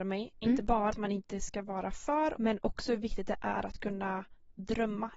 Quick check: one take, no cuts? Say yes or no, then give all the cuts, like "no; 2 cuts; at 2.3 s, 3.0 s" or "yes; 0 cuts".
no; 2 cuts; at 0.9 s, 2.3 s